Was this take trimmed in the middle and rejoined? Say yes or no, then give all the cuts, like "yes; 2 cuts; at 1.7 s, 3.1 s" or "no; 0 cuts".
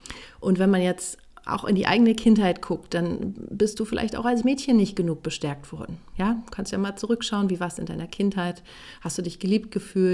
no; 0 cuts